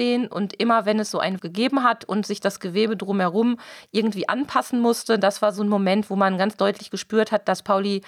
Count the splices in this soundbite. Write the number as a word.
one